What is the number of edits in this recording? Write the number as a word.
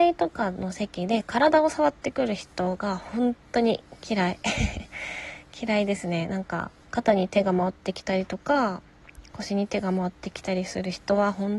one